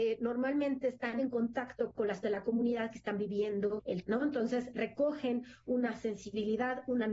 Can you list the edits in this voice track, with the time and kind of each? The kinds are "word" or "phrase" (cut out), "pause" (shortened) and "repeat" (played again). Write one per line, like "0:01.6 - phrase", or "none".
0:01.2 - word
0:02.2 - word
0:04.0 - word